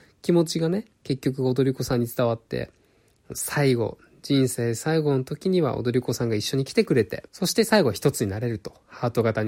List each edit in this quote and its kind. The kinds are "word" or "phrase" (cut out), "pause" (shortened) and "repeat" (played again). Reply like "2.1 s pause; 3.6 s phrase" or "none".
0.9 s pause; 7.3 s pause